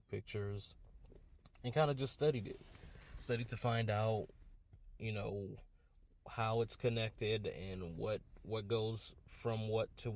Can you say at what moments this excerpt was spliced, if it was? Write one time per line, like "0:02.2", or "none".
none